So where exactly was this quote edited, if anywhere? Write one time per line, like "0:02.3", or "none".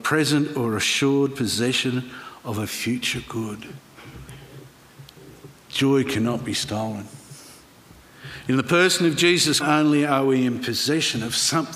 0:09.6